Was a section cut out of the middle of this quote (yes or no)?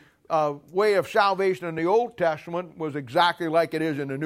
no